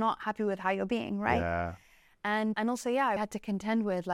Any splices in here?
yes; 2 cuts; at 2.5 s, 3.2 s

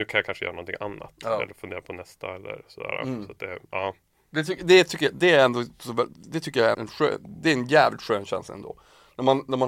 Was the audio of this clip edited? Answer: yes; 1 cut; at 6.7 s

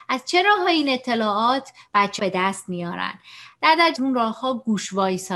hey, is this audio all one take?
no; 2 cuts; at 2.2 s, 4.0 s

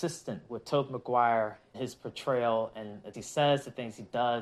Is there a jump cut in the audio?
yes; 2 cuts; at 1.7 s, 3.1 s

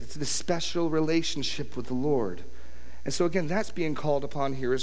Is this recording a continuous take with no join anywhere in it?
yes; 0 cuts

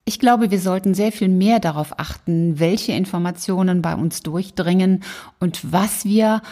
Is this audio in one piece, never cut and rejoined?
yes; 0 cuts

